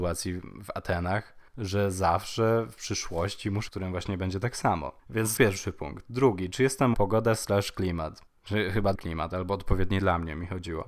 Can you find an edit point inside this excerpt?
yes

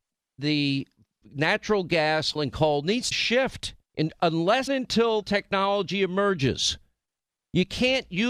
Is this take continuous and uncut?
no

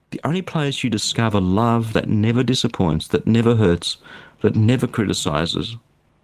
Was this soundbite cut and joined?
no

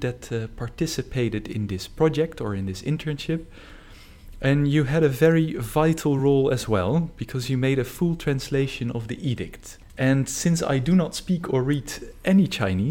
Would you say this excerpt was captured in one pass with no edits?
yes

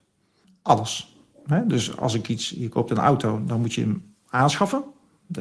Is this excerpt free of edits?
yes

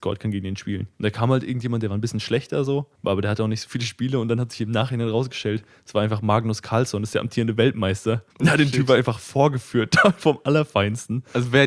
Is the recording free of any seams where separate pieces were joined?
no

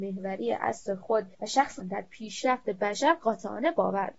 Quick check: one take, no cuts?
no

